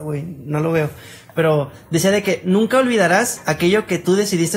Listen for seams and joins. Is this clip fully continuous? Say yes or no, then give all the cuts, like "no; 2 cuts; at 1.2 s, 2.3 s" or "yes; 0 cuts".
yes; 0 cuts